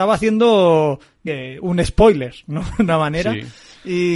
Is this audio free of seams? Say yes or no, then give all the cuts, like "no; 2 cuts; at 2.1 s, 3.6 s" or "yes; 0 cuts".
no; 2 cuts; at 1.3 s, 2.9 s